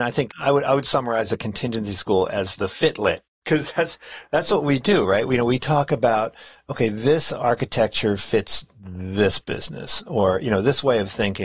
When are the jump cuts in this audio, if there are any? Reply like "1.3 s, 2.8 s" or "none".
none